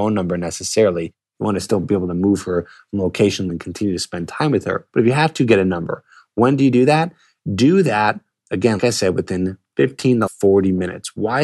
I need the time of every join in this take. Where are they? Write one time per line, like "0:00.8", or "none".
0:03.5
0:08.8
0:10.3

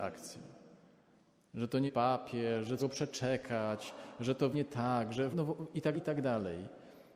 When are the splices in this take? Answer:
0:01.9
0:02.8
0:04.5
0:05.3
0:05.9

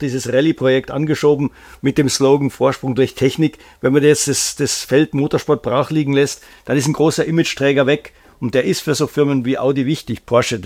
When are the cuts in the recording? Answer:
none

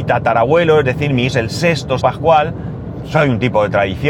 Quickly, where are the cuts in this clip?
0:01.3
0:02.0

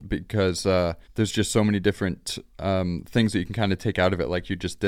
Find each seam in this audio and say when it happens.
0:01.0

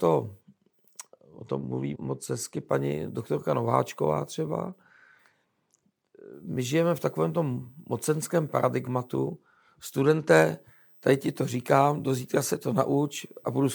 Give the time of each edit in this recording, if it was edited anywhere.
0:01.9

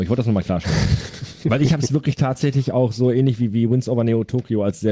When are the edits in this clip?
none

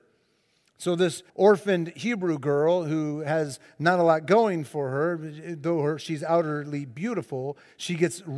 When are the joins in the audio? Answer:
0:01.3

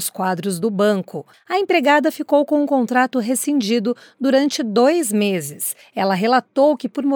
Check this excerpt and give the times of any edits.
none

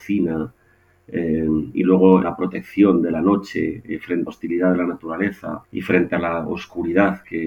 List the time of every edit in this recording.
0:02.2
0:04.3
0:05.6

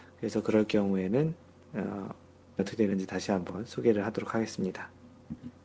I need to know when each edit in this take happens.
0:02.6

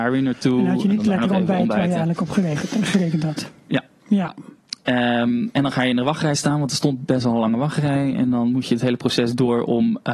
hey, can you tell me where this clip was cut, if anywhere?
none

